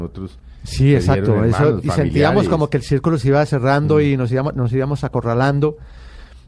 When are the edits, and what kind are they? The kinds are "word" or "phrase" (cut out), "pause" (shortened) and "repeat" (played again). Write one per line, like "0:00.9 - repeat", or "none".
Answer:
0:03.5 - word

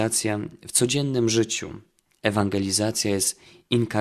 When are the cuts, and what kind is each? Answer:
none

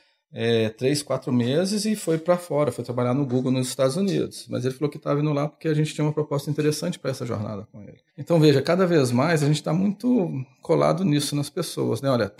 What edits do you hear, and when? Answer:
0:08.1 - pause

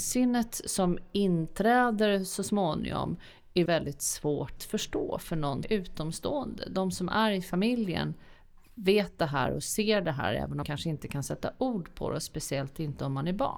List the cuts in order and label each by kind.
0:03.7 - word
0:04.6 - word
0:05.6 - word
0:10.6 - word

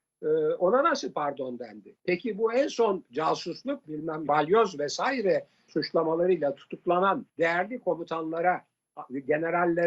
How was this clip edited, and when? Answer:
0:02.0 - pause
0:03.8 - word
0:04.3 - word
0:05.7 - word
0:07.3 - pause

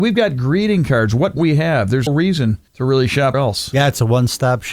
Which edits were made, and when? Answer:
0:01.4 - word
0:02.1 - word
0:02.7 - pause
0:03.3 - word

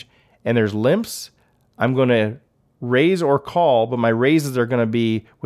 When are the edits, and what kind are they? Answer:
none

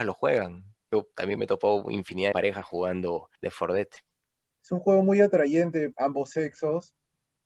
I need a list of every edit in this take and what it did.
0:02.3 - phrase
0:03.3 - pause
0:05.9 - word

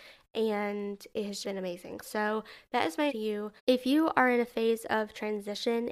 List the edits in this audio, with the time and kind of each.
0:01.4 - word
0:03.1 - word
0:03.6 - pause

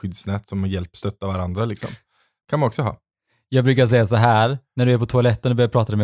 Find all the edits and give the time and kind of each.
none

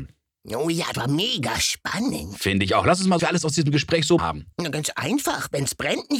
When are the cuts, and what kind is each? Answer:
0:00.9 - word
0:03.2 - phrase
0:04.2 - word
0:04.5 - pause

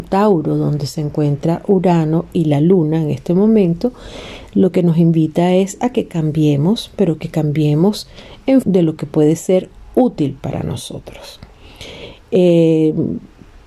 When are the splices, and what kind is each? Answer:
0:08.6 - word

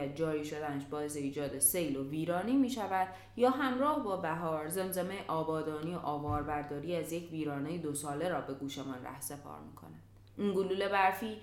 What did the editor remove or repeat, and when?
none

